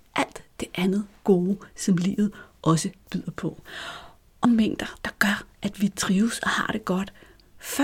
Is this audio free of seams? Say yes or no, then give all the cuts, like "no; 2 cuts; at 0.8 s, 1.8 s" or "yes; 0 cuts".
no; 1 cut; at 4.4 s